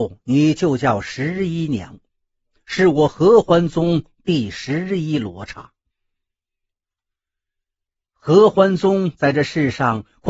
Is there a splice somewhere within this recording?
no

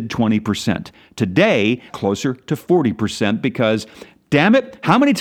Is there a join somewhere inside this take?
yes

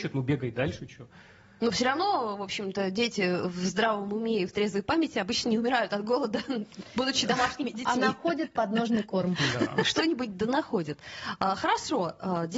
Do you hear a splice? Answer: no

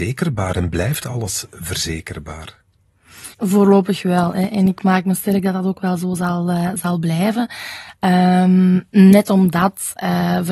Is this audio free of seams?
no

